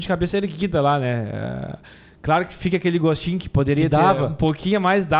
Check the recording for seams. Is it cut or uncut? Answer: uncut